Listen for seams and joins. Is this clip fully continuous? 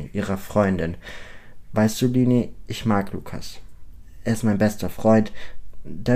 yes; 0 cuts

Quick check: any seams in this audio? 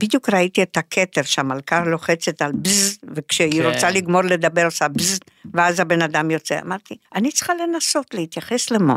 yes; 1 cut; at 7.0 s

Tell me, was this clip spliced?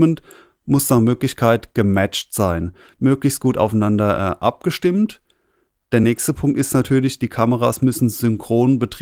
no; 0 cuts

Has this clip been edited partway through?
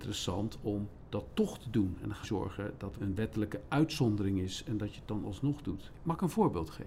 yes; 2 cuts; at 2.2 s, 3.0 s

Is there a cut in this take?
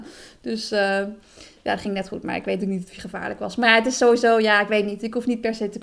no; 0 cuts

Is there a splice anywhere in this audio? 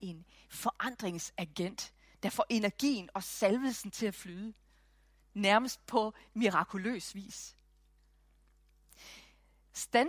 no; 0 cuts

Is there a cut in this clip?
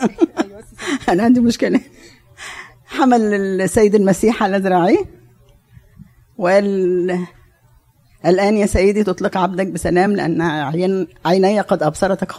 no; 0 cuts

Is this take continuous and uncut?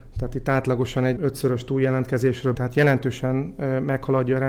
no; 2 cuts; at 1.2 s, 2.5 s

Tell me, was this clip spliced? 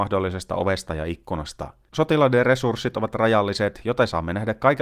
no; 0 cuts

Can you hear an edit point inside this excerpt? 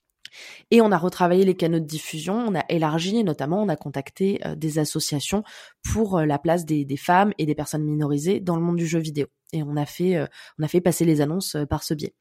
no; 0 cuts

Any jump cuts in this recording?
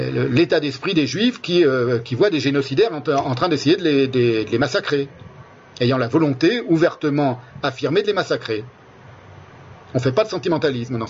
no; 0 cuts

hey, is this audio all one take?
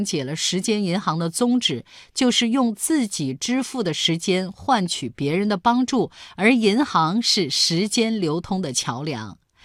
yes; 0 cuts

